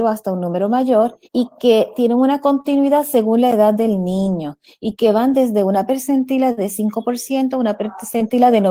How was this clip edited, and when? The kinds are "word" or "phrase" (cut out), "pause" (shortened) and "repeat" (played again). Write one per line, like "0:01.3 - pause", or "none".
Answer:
0:01.2 - pause